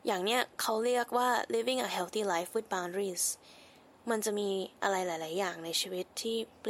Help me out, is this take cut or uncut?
uncut